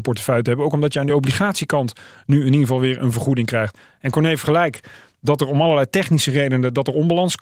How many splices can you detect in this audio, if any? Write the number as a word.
zero